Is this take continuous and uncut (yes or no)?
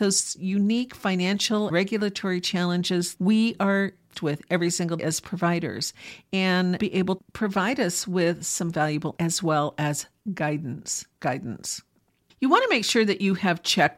no